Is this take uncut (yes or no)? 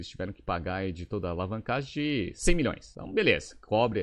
yes